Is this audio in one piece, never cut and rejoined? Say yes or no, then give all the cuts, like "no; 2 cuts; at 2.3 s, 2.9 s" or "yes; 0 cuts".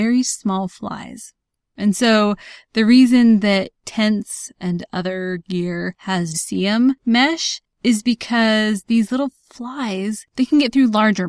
no; 1 cut; at 6.3 s